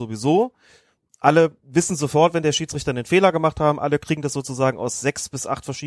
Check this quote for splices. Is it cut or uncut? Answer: uncut